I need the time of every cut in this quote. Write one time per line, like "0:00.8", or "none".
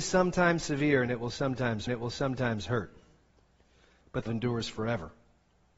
0:01.9
0:04.3